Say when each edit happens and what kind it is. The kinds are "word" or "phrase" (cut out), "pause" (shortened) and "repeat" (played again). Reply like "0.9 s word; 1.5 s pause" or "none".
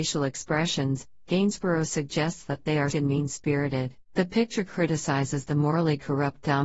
2.9 s word; 4.0 s pause